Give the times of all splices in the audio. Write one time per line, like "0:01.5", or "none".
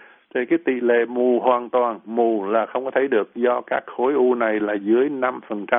none